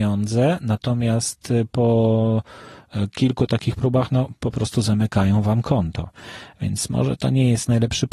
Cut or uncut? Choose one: uncut